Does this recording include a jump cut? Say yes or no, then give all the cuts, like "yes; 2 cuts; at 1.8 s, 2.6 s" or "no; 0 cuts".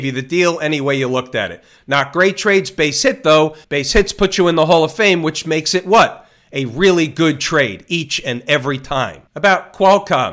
yes; 1 cut; at 3.6 s